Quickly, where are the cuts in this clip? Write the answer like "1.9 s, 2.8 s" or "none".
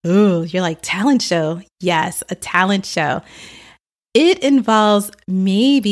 none

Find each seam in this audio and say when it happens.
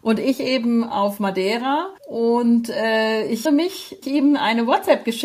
2.0 s, 3.5 s, 4.0 s

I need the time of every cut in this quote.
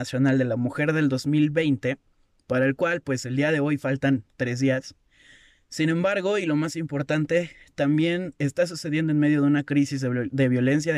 none

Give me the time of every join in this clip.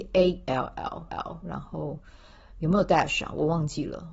1.1 s

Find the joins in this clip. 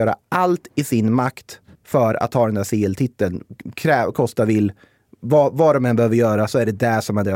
1.8 s, 4.1 s

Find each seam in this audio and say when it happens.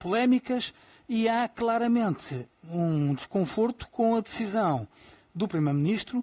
none

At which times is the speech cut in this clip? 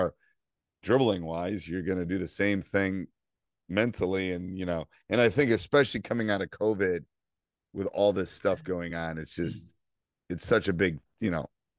none

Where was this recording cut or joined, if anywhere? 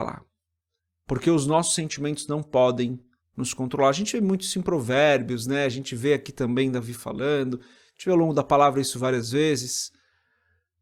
none

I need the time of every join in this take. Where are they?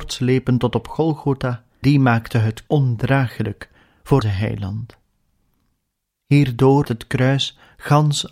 1.8 s, 2.7 s, 4.2 s, 6.8 s

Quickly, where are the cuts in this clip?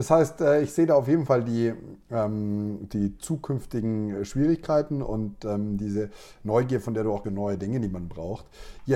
7.2 s

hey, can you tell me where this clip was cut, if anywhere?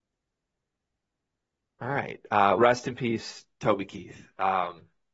2.6 s, 3.5 s

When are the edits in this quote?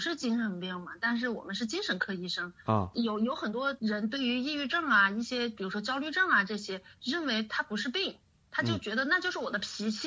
none

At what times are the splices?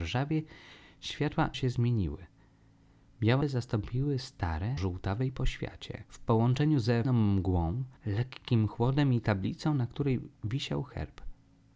1.5 s, 3.4 s, 4.8 s, 6.1 s, 7.0 s, 8.0 s

